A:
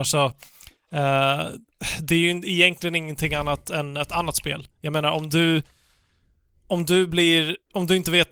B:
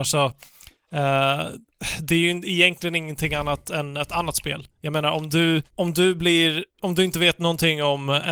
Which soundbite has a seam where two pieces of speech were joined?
B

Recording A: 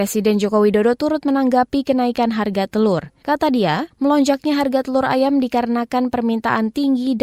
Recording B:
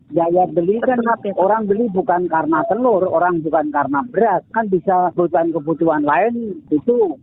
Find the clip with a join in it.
B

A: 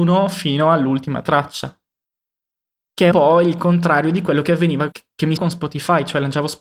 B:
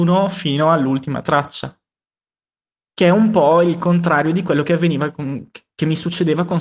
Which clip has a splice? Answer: A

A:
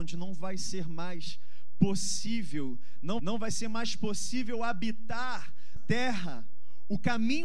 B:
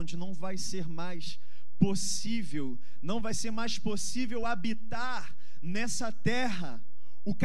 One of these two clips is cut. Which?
A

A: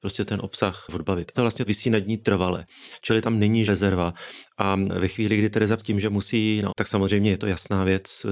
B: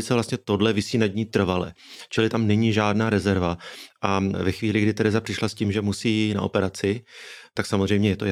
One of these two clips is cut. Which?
A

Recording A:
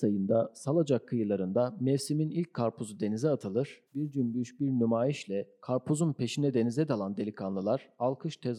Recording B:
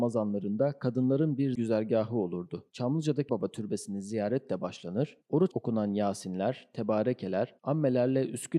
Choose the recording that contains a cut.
B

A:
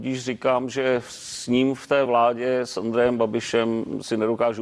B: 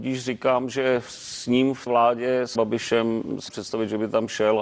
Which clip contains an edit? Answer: B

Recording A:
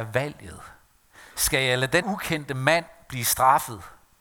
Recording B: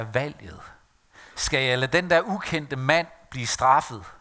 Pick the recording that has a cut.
A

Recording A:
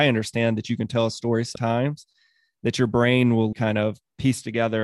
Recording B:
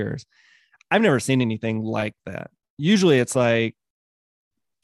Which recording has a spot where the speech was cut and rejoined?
A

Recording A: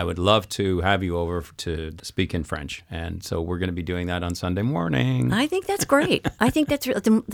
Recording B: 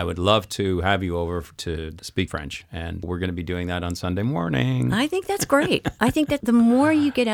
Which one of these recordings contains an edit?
B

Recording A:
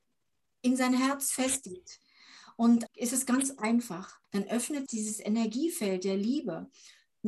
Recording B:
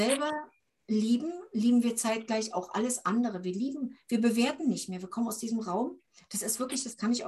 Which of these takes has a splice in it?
A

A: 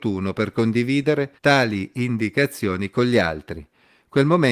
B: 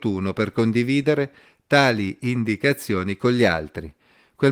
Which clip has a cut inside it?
A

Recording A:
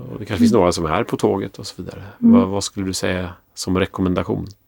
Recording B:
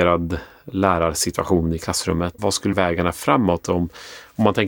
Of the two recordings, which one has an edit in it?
B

